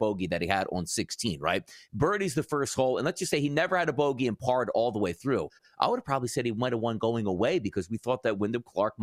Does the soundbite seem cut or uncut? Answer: uncut